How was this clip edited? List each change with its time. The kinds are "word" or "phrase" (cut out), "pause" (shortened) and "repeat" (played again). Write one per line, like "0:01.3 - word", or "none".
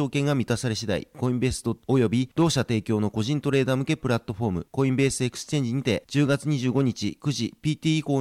0:01.8 - word